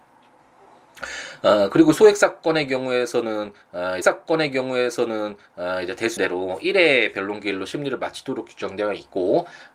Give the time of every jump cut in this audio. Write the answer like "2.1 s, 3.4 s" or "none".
4.0 s, 6.2 s